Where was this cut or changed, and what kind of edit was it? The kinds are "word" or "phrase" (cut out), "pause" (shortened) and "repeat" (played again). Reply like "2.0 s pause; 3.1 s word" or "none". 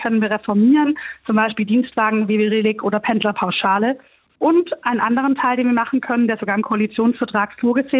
none